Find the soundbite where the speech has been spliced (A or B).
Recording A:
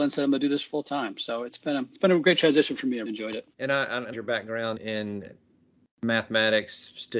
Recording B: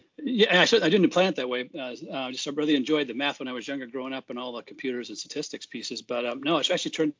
A